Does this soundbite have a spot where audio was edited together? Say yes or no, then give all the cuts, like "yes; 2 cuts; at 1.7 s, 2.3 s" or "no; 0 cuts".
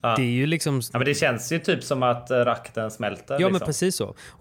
no; 0 cuts